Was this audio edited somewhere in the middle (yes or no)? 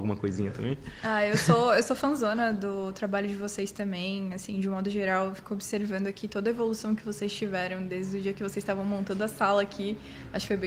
no